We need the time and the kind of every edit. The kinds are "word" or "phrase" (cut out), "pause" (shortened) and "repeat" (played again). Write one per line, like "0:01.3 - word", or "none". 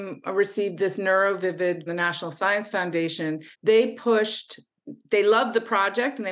0:01.9 - phrase
0:03.5 - pause